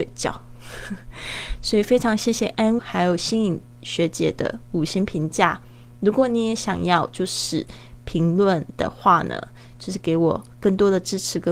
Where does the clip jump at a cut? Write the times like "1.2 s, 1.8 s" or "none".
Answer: 2.8 s